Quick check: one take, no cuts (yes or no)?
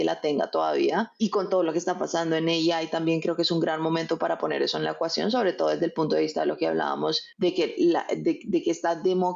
no